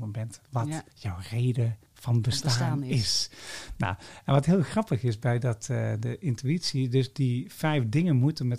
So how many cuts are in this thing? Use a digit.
2